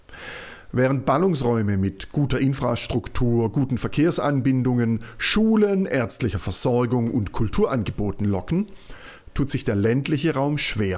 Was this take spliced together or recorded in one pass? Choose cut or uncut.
uncut